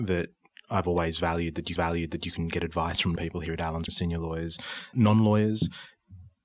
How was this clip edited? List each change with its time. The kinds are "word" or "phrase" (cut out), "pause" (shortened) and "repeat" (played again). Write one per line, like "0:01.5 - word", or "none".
0:01.8 - repeat
0:03.2 - phrase
0:03.9 - word
0:04.9 - word